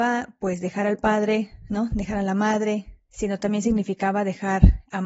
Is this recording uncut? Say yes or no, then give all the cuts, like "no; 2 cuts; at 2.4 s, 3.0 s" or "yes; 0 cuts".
yes; 0 cuts